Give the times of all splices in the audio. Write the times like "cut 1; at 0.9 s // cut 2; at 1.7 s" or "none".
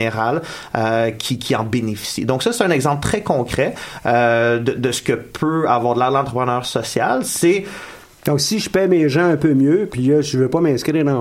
none